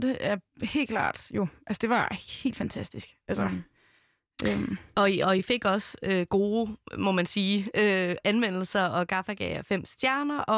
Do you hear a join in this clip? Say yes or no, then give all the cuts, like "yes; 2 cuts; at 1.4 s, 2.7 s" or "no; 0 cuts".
no; 0 cuts